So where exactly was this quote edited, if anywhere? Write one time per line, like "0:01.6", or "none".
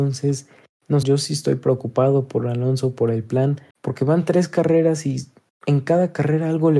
0:01.0
0:03.7

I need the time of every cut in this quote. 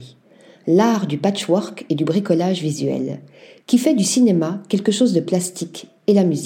none

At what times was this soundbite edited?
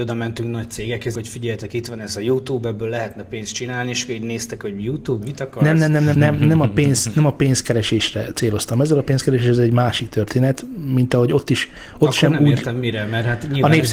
0:01.1
0:05.2
0:06.1

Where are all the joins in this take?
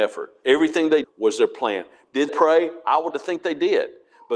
0:01.0
0:02.3
0:03.1

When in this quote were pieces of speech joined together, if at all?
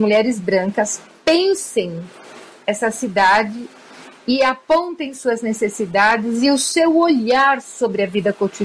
none

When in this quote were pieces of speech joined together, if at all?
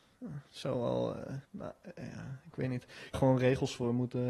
0:01.4
0:03.1

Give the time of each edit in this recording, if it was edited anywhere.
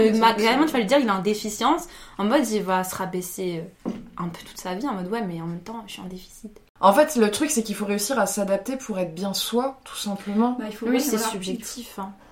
0:06.7

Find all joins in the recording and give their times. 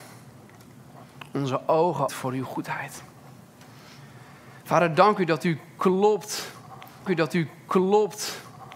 0:02.1
0:07.1

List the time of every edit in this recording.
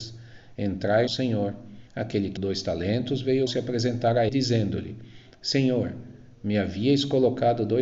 0:01.1
0:01.9
0:02.4
0:03.5
0:04.3

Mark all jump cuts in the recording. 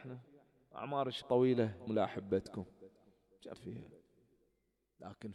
0:01.2
0:01.9
0:03.5

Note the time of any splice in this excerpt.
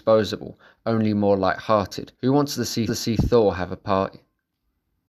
0:02.1
0:02.9

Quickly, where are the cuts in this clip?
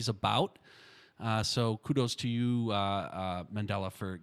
none

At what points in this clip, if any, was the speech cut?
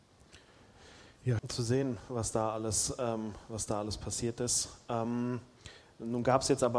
0:01.4

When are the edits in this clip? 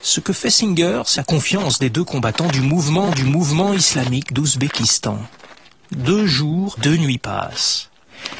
0:01.2
0:03.1
0:06.8

